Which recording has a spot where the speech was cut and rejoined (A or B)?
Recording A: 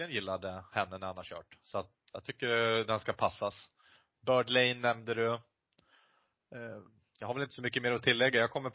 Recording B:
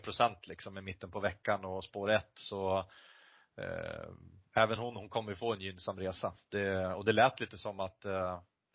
A